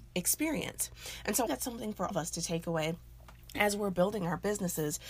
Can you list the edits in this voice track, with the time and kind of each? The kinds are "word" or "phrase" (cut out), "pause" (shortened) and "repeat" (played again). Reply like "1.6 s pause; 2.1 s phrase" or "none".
1.5 s phrase; 2.1 s word